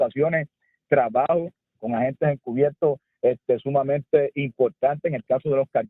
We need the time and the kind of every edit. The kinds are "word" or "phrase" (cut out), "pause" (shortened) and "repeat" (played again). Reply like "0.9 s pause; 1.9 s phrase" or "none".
none